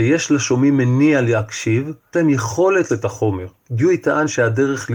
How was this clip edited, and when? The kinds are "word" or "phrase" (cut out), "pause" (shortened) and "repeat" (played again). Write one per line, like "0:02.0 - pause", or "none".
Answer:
0:02.1 - word
0:02.9 - word
0:03.6 - pause